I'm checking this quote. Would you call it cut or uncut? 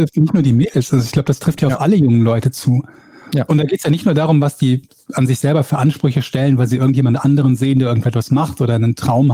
uncut